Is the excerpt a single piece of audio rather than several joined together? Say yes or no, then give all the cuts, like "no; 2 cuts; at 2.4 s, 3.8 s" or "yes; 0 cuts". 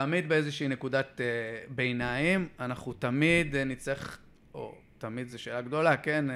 yes; 0 cuts